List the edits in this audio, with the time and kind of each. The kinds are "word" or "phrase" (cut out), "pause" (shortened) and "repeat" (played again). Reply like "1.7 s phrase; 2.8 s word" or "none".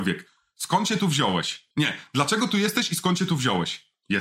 1.7 s pause